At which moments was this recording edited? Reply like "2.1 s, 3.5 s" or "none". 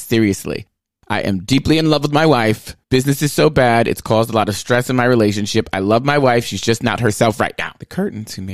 2.8 s